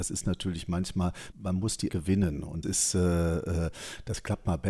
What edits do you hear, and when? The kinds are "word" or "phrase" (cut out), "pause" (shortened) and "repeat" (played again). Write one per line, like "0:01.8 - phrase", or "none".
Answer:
0:01.3 - word
0:01.9 - word
0:02.6 - word